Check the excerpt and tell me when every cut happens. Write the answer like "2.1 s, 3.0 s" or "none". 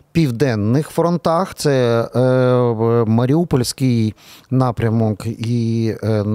1.5 s